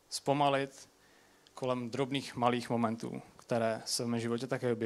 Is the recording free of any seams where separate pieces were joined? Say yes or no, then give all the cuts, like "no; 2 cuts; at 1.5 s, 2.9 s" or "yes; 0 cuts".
yes; 0 cuts